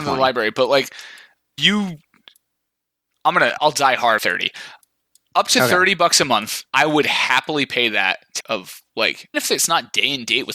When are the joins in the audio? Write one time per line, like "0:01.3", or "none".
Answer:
0:01.6
0:03.6
0:04.2
0:06.7
0:08.4
0:09.3